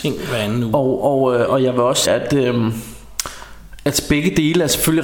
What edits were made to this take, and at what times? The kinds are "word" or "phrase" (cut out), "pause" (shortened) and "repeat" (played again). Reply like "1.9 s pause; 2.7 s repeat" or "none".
1.5 s word; 2.0 s word